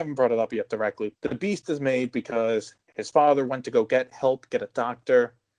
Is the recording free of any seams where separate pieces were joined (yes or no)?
no